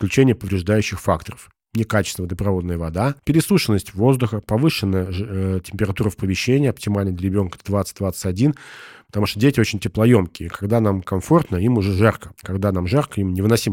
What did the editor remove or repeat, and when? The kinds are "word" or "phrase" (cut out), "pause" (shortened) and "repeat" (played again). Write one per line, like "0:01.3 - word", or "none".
0:03.2 - pause
0:12.4 - pause